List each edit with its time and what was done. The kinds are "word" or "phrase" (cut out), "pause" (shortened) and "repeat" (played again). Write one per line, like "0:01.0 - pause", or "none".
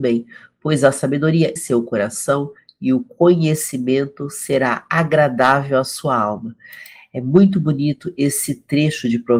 0:01.6 - phrase